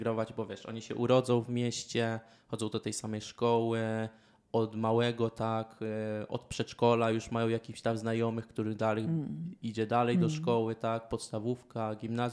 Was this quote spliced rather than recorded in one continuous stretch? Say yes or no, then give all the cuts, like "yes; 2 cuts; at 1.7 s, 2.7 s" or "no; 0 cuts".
no; 0 cuts